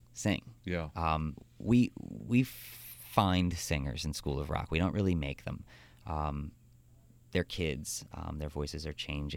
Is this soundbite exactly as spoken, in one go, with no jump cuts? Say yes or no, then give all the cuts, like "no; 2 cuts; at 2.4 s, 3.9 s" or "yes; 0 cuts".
yes; 0 cuts